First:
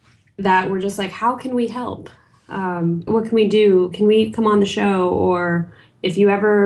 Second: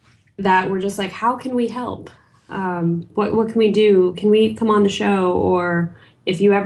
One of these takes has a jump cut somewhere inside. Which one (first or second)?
first